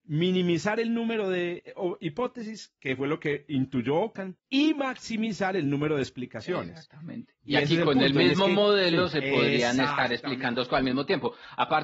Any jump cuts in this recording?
yes; 1 cut; at 4.4 s

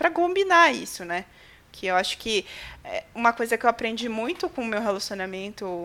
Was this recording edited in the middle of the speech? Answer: no; 0 cuts

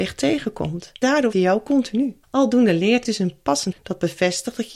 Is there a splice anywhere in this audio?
yes; 5 cuts; at 1.0 s, 1.3 s, 2.2 s, 3.0 s, 3.7 s

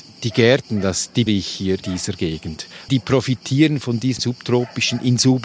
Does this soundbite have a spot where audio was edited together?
yes; 4 cuts; at 1.3 s, 1.8 s, 2.9 s, 4.2 s

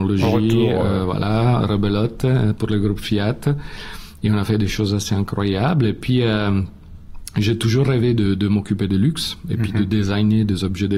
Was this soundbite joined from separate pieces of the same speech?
no; 0 cuts

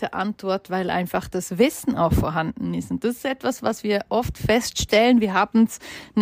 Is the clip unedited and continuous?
yes; 0 cuts

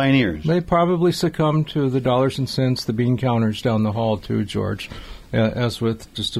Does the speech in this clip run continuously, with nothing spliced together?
yes; 0 cuts

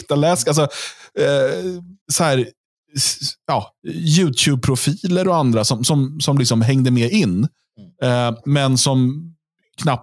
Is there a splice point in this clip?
yes; 1 cut; at 2.0 s

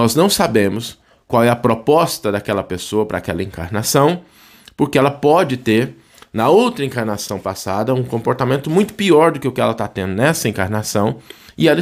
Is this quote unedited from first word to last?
yes; 0 cuts

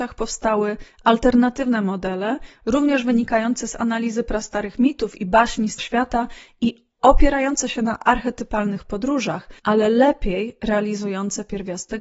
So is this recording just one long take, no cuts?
no; 2 cuts; at 5.8 s, 9.6 s

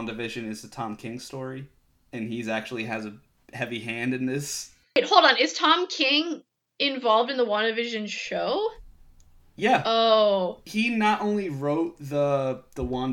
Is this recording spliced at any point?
no; 0 cuts

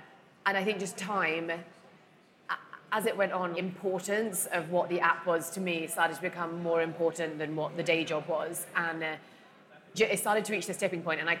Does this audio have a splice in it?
yes; 3 cuts; at 1.0 s, 3.5 s, 9.9 s

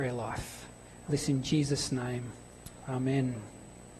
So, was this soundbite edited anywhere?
yes; 1 cut; at 1.1 s

